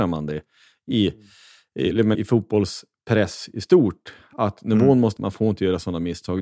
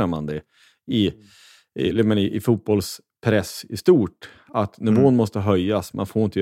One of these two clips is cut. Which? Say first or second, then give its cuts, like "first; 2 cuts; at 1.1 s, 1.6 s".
first; 2 cuts; at 2.1 s, 5.2 s